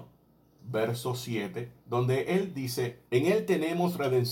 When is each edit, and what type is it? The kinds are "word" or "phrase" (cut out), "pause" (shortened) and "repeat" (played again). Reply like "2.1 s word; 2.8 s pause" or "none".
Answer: 1.8 s pause; 3.1 s pause